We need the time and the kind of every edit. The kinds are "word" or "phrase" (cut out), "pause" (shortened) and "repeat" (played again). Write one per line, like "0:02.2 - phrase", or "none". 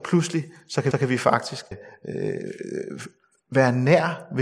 0:00.9 - repeat
0:01.7 - word